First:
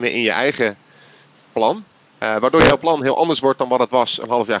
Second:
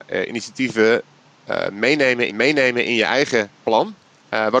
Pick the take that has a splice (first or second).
second